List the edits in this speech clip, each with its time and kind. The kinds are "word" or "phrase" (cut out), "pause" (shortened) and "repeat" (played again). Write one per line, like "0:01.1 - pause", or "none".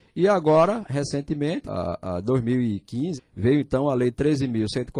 0:01.6 - word
0:03.2 - phrase